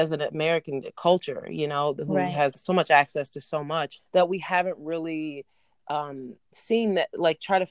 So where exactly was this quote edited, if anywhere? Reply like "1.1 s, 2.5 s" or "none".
2.5 s, 4.0 s